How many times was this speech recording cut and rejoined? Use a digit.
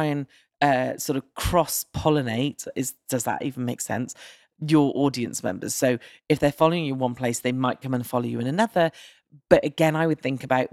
1